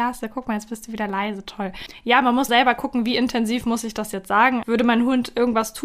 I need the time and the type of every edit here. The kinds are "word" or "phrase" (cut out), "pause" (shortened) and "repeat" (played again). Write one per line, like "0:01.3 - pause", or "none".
0:02.5 - word
0:04.6 - word